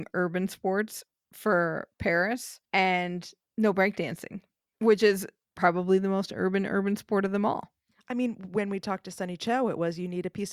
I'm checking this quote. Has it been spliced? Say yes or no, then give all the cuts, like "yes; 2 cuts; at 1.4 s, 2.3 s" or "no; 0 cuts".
yes; 1 cut; at 2.6 s